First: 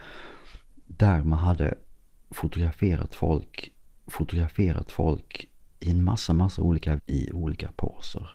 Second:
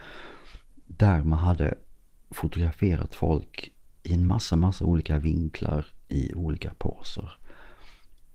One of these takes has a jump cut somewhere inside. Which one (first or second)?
first